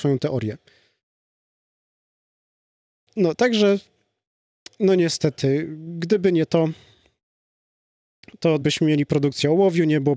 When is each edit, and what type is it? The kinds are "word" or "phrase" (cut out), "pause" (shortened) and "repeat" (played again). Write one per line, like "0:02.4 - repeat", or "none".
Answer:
0:08.6 - word